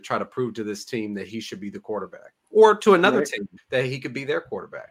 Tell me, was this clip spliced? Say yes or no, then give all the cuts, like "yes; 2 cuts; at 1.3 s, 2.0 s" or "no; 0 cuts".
yes; 2 cuts; at 2.4 s, 3.6 s